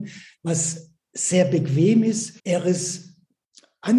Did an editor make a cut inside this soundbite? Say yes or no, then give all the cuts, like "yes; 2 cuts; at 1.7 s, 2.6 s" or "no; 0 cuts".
yes; 1 cut; at 2.4 s